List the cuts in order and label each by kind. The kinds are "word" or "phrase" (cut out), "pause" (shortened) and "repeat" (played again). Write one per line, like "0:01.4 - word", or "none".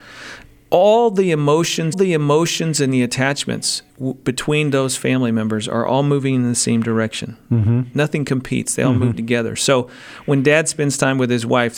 0:01.9 - repeat
0:03.9 - pause